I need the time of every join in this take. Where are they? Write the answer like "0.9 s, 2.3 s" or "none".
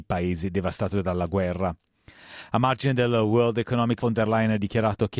4.0 s